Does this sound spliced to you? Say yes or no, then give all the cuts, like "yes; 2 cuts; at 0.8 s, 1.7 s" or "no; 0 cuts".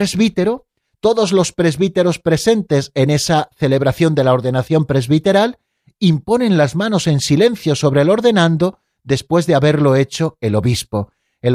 no; 0 cuts